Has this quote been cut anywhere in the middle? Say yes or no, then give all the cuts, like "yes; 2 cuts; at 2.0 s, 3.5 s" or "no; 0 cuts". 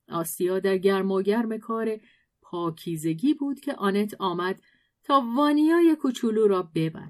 no; 0 cuts